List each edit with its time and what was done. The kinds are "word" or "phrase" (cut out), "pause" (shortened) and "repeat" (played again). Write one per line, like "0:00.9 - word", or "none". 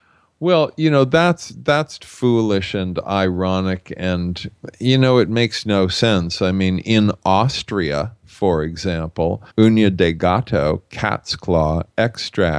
0:02.0 - word
0:09.5 - pause

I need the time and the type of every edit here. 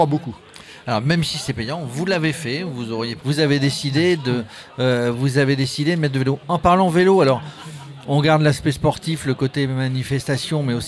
0:03.2 - phrase

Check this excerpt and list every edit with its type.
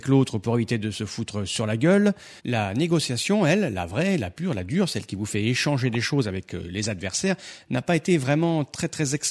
0:02.4 - pause

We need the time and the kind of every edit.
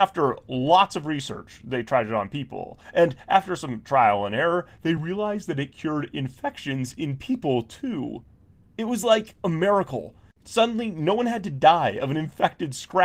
none

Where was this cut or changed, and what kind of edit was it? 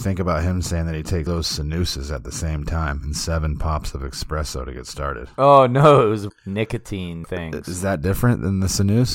0:01.3 - phrase
0:06.3 - word
0:07.2 - word

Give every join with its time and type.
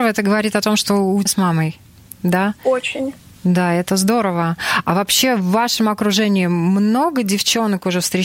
0:01.3 - phrase
0:03.2 - pause

